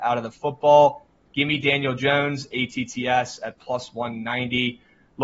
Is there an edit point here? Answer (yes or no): no